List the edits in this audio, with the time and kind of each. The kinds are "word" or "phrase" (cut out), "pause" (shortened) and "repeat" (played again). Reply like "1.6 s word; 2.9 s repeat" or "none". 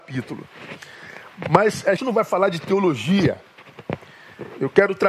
2.0 s word

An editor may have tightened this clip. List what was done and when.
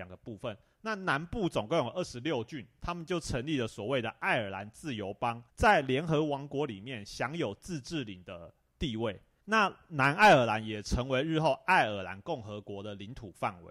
5.5 s pause

